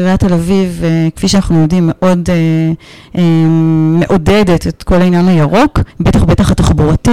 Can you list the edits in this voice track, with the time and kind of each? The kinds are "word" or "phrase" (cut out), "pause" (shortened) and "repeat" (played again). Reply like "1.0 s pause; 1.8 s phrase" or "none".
5.9 s pause